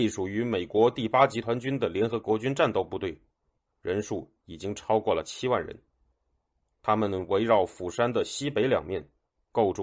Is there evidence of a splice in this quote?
no; 0 cuts

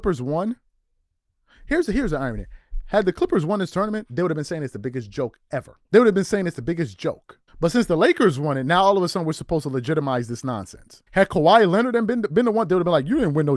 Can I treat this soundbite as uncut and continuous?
no; 3 cuts; at 5.9 s, 7.5 s, 11.1 s

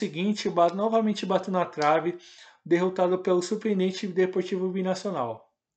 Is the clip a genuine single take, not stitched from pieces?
yes; 0 cuts

